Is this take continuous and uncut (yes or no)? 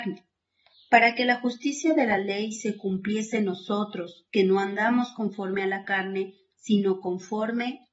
yes